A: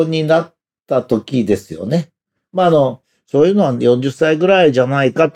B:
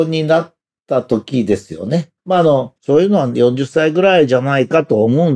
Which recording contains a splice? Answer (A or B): B